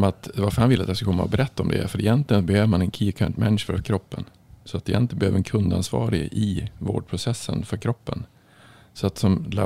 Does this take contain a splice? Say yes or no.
yes